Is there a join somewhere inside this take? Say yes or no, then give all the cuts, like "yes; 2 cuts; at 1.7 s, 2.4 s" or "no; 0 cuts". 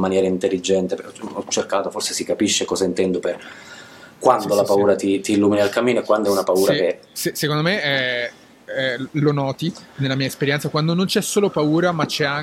no; 0 cuts